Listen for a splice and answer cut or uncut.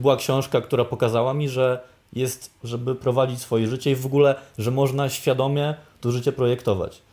cut